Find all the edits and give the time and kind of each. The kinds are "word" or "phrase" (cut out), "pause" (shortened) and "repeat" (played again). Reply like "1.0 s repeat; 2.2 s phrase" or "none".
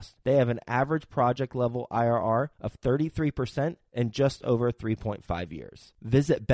none